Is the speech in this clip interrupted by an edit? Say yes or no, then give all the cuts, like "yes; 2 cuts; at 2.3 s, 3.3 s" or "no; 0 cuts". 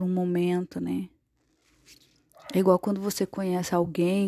no; 0 cuts